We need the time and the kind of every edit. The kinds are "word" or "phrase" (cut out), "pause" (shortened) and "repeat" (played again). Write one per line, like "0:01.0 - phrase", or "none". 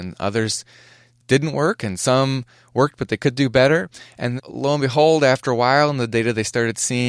0:04.4 - word